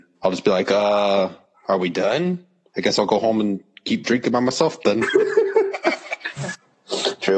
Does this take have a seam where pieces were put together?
no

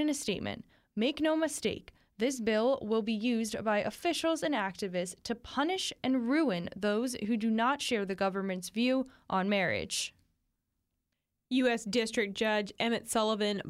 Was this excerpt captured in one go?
yes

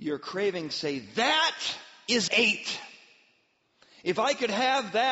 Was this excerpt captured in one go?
no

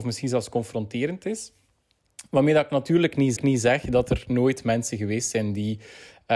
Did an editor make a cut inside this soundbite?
yes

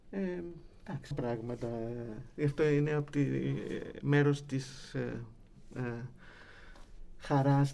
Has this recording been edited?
yes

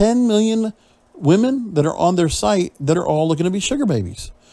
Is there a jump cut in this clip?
no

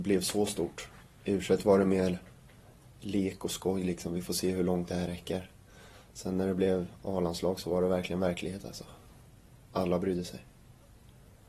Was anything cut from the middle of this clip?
no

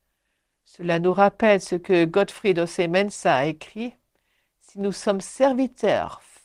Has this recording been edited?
no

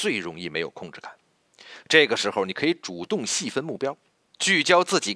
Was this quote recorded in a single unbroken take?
yes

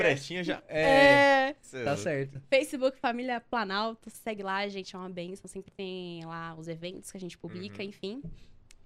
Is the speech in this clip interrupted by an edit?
no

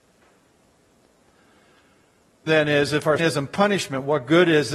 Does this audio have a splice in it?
yes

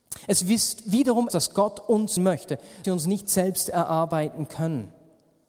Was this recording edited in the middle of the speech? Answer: yes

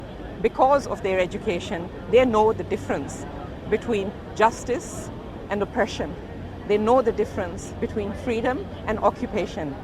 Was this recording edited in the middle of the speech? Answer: no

